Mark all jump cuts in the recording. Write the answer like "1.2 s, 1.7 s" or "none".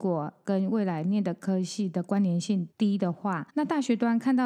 2.7 s, 3.5 s